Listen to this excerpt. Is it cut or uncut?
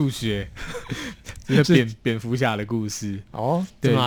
uncut